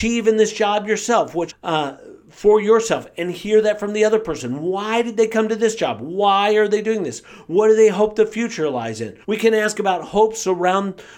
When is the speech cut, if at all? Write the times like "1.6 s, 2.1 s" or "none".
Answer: 1.5 s, 9.2 s